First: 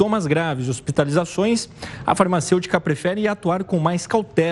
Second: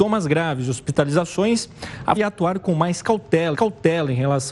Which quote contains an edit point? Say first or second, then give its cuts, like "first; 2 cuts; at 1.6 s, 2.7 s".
second; 2 cuts; at 2.2 s, 3.5 s